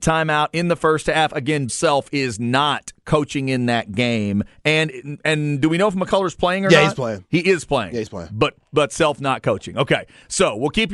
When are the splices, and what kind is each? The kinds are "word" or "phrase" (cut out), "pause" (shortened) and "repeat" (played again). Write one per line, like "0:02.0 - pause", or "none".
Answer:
0:01.7 - word